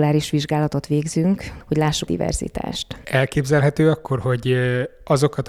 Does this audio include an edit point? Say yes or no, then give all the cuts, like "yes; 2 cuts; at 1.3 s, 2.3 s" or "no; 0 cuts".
yes; 1 cut; at 2.1 s